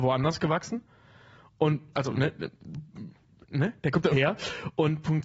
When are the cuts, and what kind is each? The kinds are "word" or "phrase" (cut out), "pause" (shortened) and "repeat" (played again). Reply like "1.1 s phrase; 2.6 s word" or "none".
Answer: 1.9 s word; 4.1 s word